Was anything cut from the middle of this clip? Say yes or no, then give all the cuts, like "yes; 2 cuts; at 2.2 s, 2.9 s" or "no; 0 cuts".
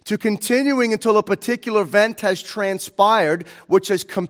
no; 0 cuts